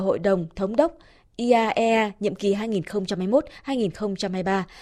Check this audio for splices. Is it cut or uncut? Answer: uncut